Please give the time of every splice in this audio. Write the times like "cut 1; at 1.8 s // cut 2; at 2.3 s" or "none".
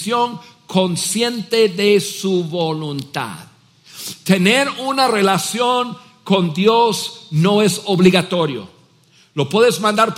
none